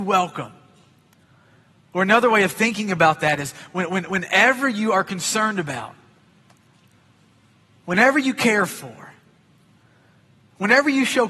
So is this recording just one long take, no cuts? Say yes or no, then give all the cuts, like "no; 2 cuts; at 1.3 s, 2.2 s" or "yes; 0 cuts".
yes; 0 cuts